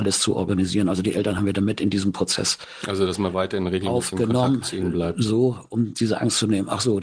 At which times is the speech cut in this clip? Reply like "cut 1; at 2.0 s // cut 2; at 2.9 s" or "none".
none